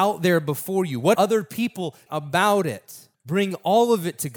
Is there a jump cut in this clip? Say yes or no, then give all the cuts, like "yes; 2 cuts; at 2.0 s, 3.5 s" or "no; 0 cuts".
yes; 3 cuts; at 1.1 s, 2.1 s, 3.1 s